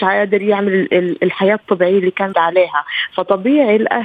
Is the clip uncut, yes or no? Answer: no